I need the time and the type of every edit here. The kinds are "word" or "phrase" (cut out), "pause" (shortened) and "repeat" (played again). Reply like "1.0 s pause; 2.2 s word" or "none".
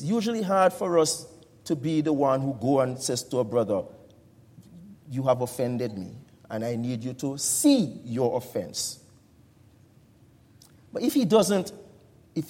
none